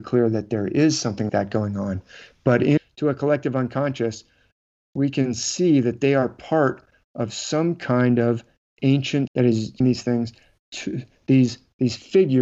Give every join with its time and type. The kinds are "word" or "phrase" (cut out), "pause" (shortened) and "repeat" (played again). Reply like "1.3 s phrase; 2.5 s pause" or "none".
1.3 s word; 2.8 s word; 9.3 s word; 9.8 s word